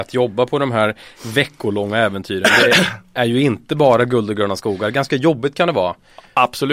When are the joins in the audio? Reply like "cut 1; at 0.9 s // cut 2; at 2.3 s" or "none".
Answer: none